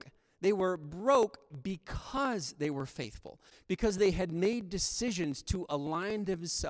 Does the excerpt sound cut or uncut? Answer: uncut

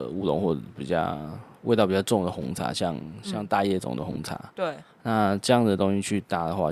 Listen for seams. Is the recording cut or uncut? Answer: cut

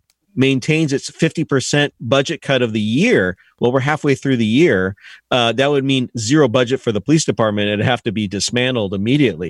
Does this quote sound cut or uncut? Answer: uncut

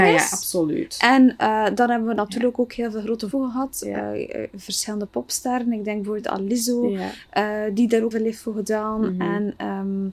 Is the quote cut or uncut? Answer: cut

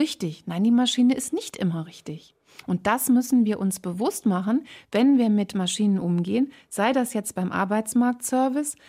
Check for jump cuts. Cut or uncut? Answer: uncut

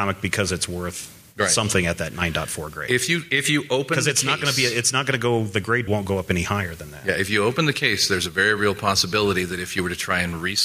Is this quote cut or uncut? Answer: cut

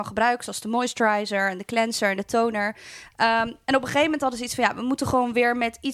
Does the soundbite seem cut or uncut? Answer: uncut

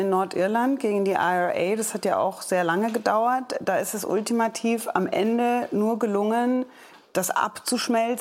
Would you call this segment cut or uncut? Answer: uncut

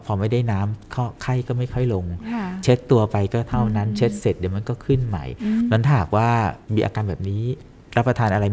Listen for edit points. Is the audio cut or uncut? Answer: cut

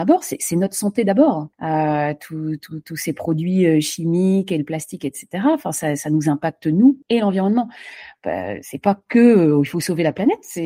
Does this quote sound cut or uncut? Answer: cut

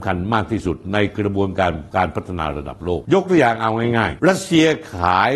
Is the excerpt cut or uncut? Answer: cut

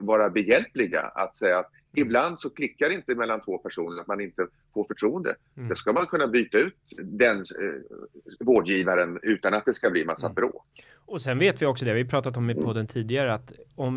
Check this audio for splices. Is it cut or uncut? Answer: cut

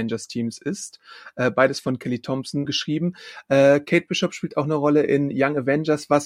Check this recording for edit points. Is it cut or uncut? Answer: cut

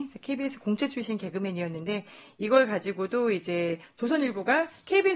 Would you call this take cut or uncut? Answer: uncut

